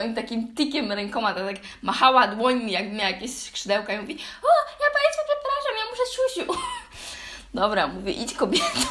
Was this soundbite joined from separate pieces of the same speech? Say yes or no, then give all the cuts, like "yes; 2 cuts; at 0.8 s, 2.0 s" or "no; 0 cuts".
no; 0 cuts